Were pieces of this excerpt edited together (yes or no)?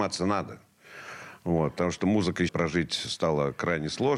yes